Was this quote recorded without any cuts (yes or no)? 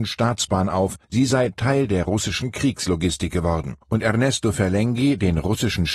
no